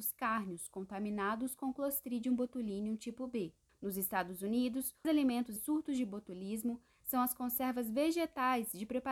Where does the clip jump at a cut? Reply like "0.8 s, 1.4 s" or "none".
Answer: 3.7 s, 5.0 s, 5.6 s